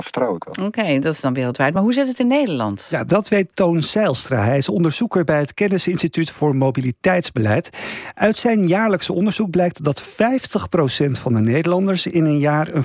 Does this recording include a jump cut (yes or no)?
no